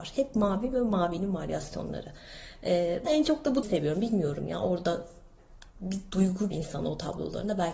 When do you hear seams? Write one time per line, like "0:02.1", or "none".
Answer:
0:03.1
0:03.6
0:05.7
0:06.5